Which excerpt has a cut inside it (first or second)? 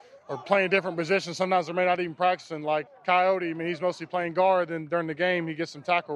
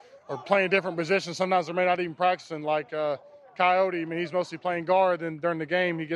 first